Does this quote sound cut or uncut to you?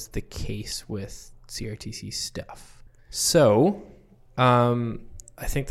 uncut